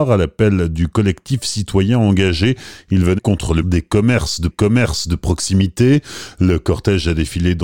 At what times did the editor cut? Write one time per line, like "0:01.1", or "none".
0:03.2
0:03.6
0:04.5